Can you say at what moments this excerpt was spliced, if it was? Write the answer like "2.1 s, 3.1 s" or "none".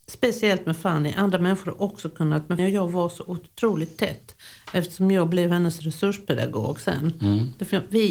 2.6 s

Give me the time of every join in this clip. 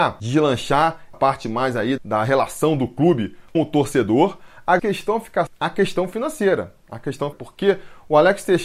1.1 s, 2.0 s, 3.5 s, 4.8 s, 5.5 s, 7.3 s

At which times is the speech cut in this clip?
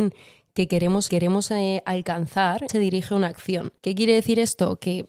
1.1 s, 2.7 s, 3.8 s

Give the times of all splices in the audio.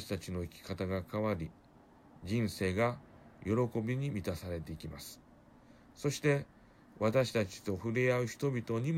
none

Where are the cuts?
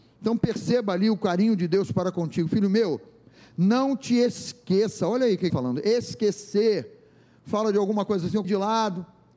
5.5 s, 8.4 s

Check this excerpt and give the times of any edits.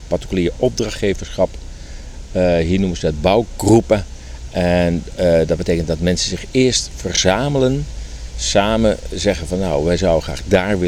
none

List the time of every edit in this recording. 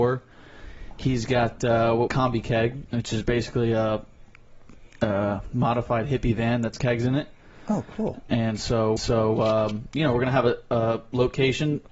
2.1 s, 2.9 s, 6.8 s, 9.0 s

